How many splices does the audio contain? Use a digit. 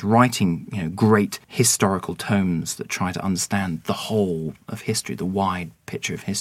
1